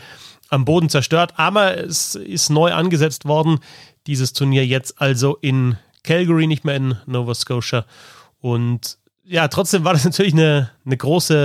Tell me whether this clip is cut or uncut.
uncut